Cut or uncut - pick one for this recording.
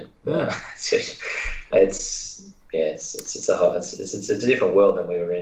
cut